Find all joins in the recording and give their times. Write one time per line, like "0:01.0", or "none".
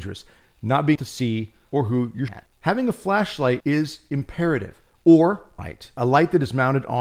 0:01.0
0:01.7
0:02.3
0:03.6
0:05.6